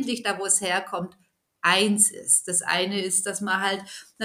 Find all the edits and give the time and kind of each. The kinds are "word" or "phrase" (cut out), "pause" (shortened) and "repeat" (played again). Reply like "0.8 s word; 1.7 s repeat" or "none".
none